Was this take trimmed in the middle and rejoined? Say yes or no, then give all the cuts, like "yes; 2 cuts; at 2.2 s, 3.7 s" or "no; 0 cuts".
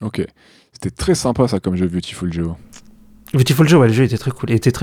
no; 0 cuts